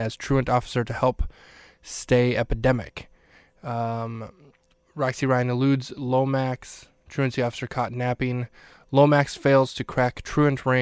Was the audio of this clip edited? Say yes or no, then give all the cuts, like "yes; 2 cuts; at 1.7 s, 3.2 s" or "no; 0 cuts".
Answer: no; 0 cuts